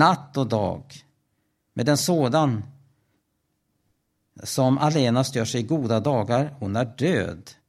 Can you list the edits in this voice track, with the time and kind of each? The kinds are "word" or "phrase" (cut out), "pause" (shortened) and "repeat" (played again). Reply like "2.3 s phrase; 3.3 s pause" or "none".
none